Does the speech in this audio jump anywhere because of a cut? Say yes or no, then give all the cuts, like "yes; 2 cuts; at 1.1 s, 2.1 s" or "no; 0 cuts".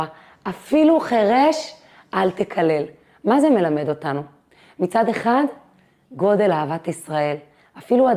no; 0 cuts